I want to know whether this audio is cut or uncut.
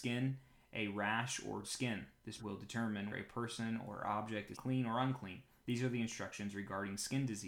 cut